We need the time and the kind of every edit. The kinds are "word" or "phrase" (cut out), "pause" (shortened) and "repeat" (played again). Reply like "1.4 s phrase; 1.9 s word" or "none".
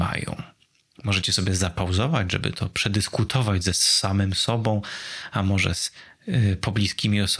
none